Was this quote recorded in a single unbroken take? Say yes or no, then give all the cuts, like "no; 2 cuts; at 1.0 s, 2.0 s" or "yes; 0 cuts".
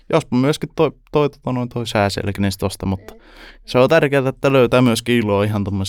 yes; 0 cuts